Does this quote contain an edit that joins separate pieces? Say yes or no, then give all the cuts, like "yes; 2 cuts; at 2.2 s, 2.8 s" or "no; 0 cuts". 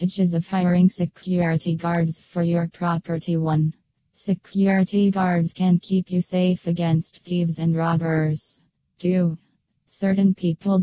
no; 0 cuts